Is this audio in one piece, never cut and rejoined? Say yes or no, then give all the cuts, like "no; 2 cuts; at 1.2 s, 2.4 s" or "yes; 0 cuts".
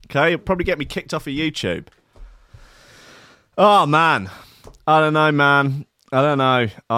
yes; 0 cuts